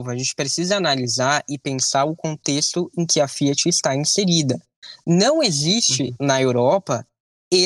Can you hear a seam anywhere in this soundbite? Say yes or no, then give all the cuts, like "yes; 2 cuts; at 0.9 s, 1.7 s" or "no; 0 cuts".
no; 0 cuts